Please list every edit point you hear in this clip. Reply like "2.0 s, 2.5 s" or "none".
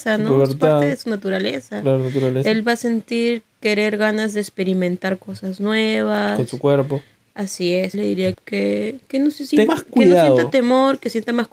7.9 s, 8.3 s, 9.7 s

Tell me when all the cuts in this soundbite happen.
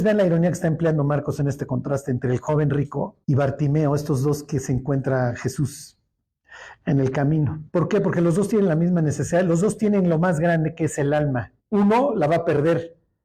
3.2 s, 7.7 s, 11.6 s

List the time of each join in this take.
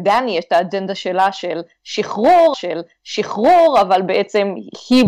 2.5 s

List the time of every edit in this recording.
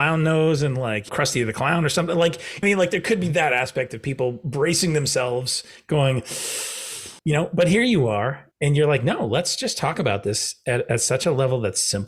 1.1 s, 2.6 s, 7.2 s, 8.5 s

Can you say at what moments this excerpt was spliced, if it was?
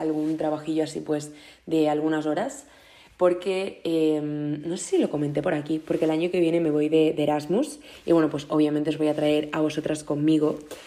none

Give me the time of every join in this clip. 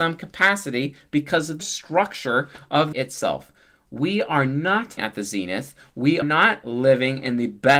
1.6 s, 2.9 s, 5.0 s, 6.2 s

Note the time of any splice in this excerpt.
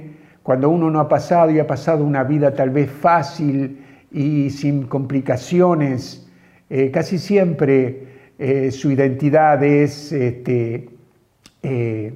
none

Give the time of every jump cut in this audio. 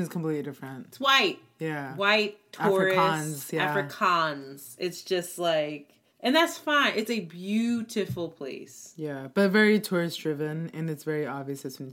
6.1 s

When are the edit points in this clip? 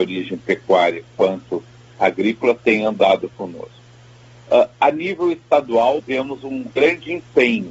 6.0 s

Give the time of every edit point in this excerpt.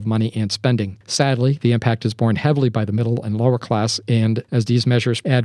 1.0 s

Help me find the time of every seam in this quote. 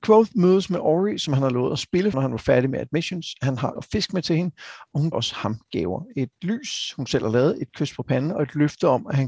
2.1 s, 3.8 s, 5.1 s

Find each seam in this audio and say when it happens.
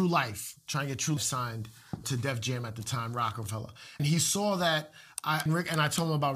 1.2 s, 2.0 s, 4.0 s, 5.5 s

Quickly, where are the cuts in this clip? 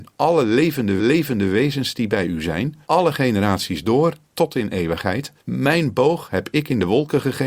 1.0 s, 2.8 s, 5.4 s

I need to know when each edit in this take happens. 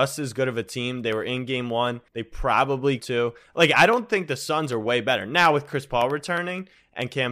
2.1 s, 3.0 s

